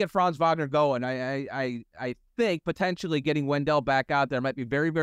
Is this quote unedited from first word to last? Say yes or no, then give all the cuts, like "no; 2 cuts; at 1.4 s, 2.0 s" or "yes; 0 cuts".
yes; 0 cuts